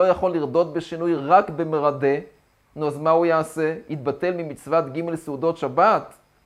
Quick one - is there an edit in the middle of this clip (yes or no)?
no